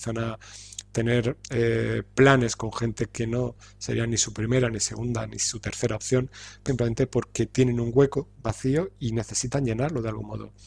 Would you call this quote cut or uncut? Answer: cut